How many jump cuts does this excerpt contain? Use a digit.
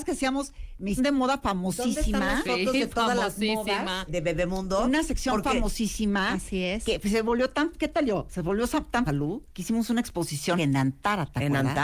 4